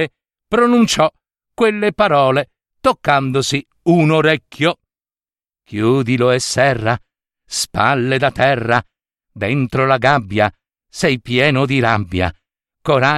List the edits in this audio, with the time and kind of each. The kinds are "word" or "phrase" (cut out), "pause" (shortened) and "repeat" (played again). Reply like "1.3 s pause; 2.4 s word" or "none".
none